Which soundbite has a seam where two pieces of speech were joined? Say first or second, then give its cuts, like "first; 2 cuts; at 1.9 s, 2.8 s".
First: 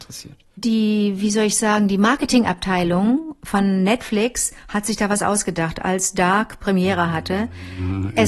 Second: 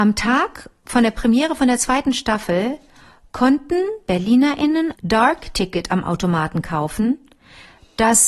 second; 1 cut; at 4.9 s